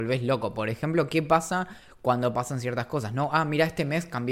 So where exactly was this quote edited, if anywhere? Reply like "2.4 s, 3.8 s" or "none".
none